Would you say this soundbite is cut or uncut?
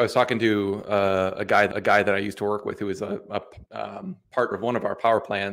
cut